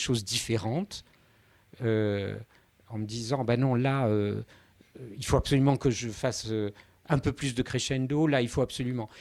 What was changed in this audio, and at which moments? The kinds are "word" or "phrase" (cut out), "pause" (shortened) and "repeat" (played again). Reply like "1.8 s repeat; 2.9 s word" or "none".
none